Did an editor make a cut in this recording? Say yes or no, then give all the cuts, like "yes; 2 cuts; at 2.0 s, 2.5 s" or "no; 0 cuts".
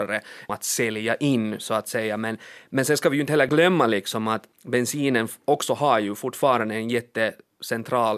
no; 0 cuts